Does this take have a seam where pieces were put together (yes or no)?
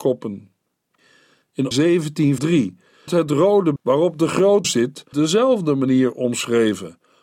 yes